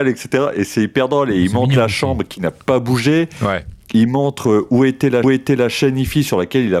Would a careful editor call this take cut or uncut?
cut